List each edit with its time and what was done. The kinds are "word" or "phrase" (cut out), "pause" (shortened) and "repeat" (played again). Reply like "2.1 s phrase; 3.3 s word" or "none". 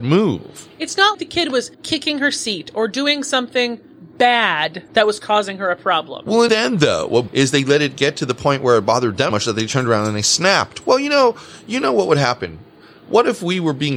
1.1 s word; 1.7 s pause; 4.9 s pause; 6.5 s word; 7.3 s phrase; 9.3 s word